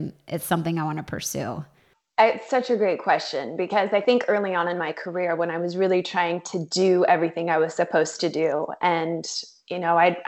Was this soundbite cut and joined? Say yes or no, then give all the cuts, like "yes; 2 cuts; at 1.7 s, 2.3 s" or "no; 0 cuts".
no; 0 cuts